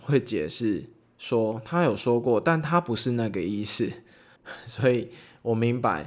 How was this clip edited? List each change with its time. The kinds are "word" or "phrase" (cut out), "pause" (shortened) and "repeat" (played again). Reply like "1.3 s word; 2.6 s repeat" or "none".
none